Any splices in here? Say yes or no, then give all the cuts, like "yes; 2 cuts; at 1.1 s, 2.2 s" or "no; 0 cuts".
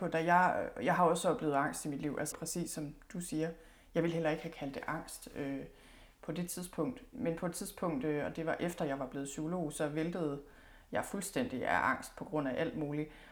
yes; 2 cuts; at 2.3 s, 7.1 s